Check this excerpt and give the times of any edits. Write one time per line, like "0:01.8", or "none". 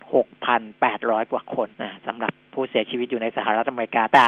0:01.7